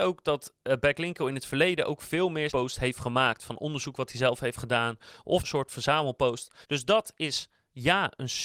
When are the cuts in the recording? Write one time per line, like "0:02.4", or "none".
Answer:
0:02.5
0:05.4
0:06.6